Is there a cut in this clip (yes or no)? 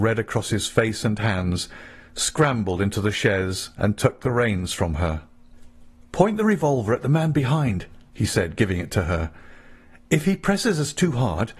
no